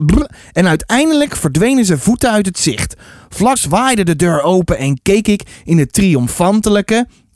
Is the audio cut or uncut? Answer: cut